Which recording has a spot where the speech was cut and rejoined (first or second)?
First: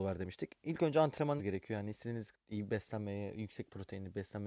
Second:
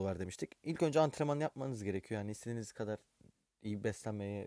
first